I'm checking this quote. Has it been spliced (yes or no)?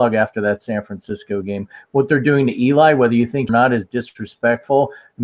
yes